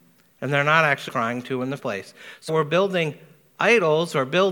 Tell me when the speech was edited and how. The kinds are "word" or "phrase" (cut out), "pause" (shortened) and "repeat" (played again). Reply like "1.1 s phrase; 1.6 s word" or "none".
1.1 s word; 1.8 s word; 2.5 s word

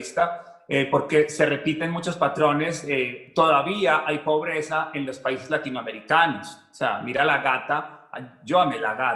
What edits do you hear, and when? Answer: none

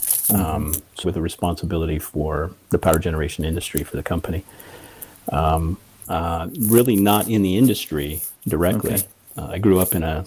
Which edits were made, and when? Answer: 1.0 s word; 6.0 s phrase

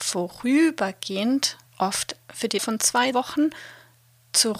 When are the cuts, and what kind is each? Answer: 1.7 s pause; 2.6 s word; 3.1 s word

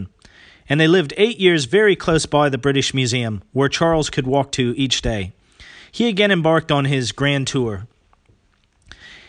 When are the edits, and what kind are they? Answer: none

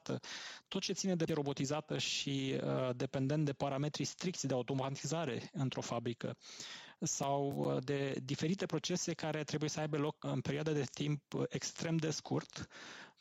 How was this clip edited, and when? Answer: 1.3 s word; 10.2 s word

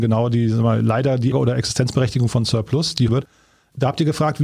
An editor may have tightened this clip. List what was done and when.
1.3 s word; 3.1 s phrase

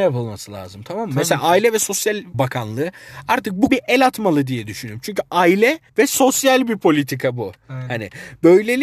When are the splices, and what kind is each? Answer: 2.3 s word; 3.7 s word; 5.9 s pause

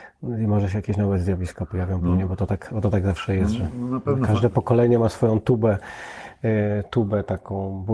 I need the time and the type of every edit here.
none

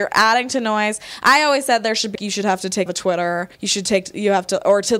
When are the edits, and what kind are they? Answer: 2.1 s word; 2.9 s phrase; 3.5 s pause

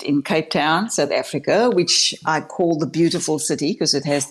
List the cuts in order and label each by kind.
none

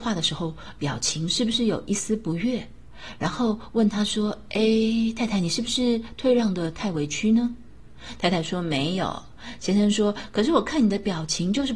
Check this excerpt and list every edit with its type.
none

